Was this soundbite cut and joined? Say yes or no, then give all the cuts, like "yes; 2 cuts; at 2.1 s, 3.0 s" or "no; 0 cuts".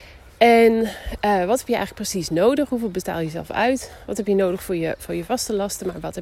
no; 0 cuts